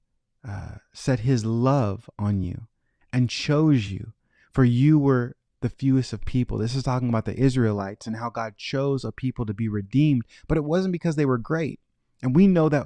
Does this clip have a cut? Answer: no; 0 cuts

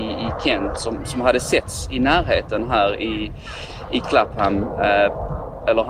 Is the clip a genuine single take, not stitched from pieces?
yes; 0 cuts

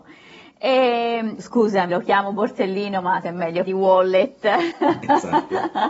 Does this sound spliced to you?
yes; 4 cuts; at 1.4 s, 1.9 s, 3.2 s, 3.7 s

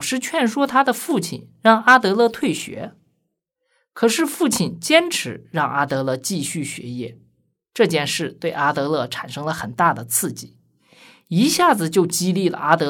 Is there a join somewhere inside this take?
no; 0 cuts

